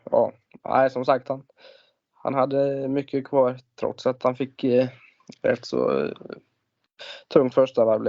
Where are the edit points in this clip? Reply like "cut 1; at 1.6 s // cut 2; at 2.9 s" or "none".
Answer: none